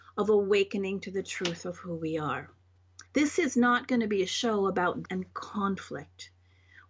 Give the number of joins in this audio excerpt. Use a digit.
2